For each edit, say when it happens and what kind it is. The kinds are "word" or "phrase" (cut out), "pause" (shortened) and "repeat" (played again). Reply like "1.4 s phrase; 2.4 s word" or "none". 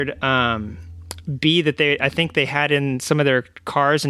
none